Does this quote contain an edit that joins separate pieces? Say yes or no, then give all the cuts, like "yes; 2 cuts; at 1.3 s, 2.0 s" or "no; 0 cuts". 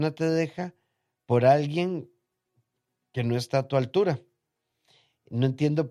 no; 0 cuts